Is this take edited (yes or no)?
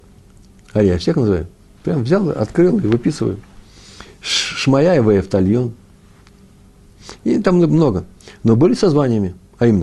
no